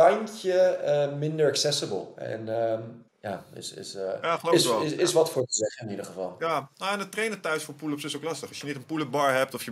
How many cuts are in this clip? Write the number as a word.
one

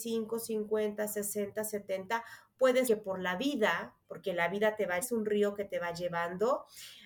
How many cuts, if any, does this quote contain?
three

